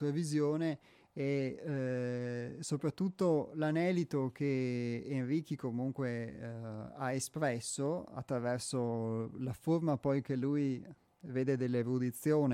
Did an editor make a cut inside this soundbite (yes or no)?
no